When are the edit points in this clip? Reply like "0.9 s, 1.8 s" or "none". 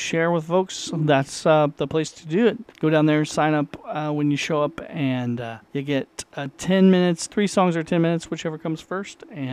2.7 s, 5.6 s